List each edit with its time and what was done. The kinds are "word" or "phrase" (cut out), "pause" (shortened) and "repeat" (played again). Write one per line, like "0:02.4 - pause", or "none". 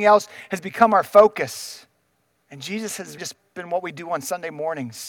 0:02.1 - pause
0:03.2 - word